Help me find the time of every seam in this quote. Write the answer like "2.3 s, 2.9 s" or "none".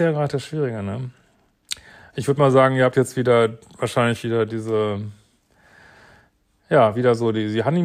none